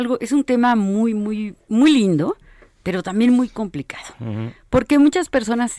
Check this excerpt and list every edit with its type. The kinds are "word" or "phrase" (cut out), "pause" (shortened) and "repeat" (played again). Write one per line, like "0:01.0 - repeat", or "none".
none